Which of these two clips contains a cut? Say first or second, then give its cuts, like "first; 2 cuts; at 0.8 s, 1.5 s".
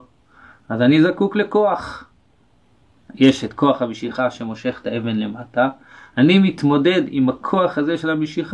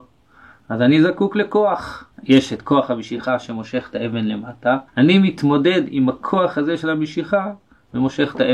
second; 2 cuts; at 2.1 s, 4.9 s